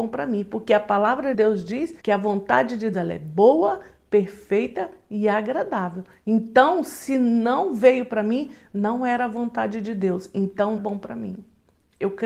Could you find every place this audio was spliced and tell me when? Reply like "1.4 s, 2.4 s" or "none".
1.3 s, 2.0 s, 2.9 s, 10.8 s